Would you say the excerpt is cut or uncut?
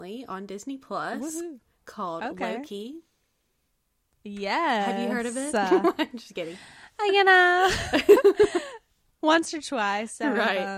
uncut